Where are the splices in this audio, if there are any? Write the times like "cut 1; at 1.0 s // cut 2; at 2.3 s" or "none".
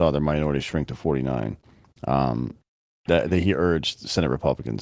none